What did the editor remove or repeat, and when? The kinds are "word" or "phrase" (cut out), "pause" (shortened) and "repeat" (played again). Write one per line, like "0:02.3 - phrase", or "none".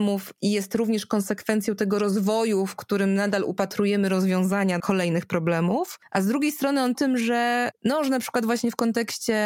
0:04.8 - word
0:06.9 - phrase